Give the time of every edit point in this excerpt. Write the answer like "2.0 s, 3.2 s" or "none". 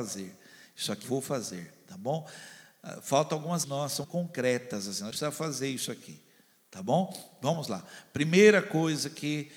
1.0 s, 3.6 s, 4.0 s, 5.1 s

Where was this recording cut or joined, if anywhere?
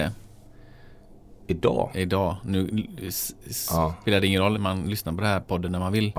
4.5 s

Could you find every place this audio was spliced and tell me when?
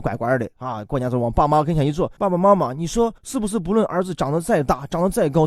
2.2 s, 3.2 s

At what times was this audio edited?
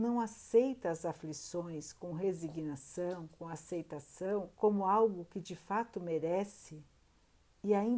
4.5 s

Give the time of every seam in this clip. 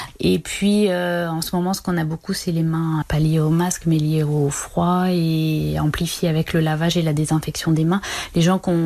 3.0 s

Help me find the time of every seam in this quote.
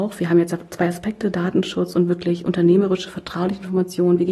none

